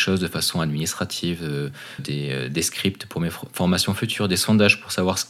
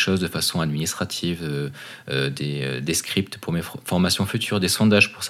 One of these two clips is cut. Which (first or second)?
first